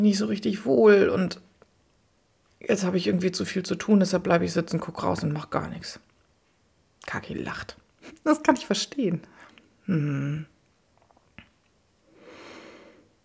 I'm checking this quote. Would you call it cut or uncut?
uncut